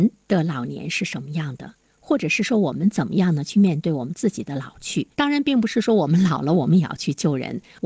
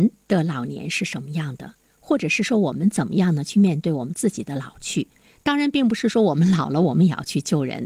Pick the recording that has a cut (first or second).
first